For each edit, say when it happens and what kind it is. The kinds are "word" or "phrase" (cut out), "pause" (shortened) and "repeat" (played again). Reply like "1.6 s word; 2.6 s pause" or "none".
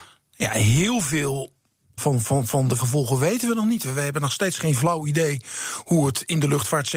2.0 s word; 2.8 s word